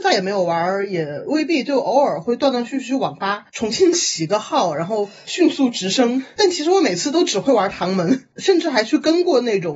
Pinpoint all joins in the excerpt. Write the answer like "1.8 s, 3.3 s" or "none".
none